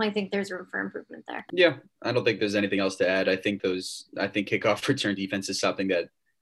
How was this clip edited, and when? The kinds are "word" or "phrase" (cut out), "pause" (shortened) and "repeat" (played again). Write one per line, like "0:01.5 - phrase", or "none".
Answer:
0:03.6 - word

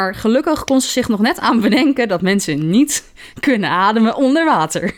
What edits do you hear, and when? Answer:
none

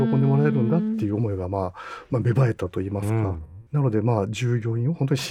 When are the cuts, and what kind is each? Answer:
0:03.7 - pause

